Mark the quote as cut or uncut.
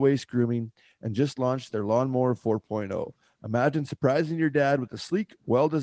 uncut